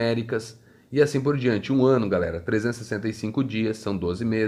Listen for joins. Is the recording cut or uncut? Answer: uncut